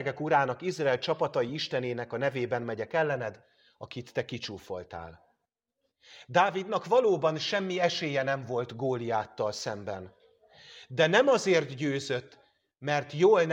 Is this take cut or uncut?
uncut